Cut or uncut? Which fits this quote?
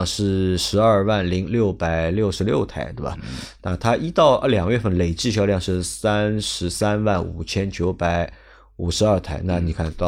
uncut